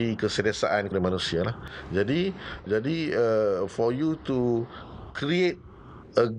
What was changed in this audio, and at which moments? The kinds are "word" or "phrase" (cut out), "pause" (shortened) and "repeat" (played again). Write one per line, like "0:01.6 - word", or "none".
0:00.9 - word
0:02.7 - word